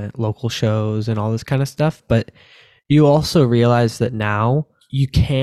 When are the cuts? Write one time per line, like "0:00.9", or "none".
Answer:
none